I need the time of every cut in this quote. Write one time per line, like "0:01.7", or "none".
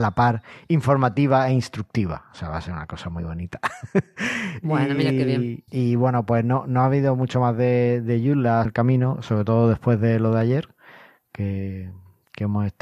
0:05.7
0:08.6

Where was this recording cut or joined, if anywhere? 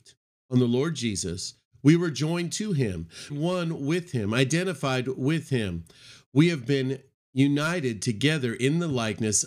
0:03.3

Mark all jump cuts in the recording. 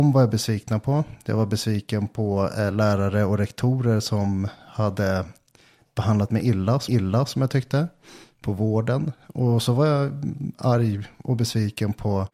0:06.9

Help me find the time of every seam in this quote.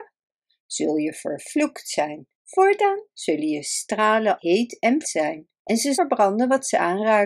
0:02.3
0:04.4
0:05.0
0:05.6
0:05.9

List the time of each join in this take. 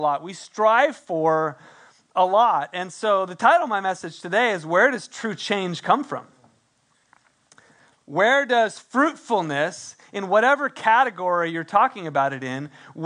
none

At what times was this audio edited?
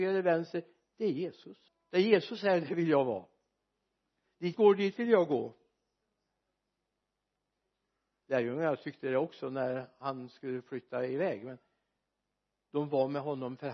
0:01.7
0:04.5

